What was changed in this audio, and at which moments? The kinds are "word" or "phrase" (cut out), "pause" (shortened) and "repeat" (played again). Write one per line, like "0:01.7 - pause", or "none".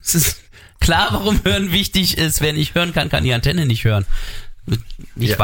none